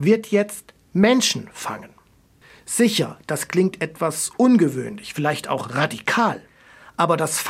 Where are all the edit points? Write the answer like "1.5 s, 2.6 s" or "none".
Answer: none